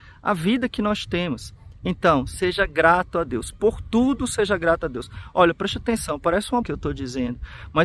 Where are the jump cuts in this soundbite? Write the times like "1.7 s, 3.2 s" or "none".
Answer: 6.6 s